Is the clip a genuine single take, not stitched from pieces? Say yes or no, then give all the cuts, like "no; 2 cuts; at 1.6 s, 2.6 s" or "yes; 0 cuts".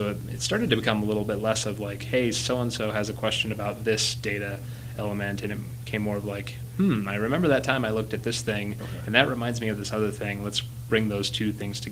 yes; 0 cuts